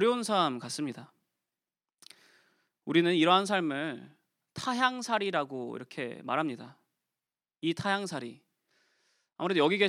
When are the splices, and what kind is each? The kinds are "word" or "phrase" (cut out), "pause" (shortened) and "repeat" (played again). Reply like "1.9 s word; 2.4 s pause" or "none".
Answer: none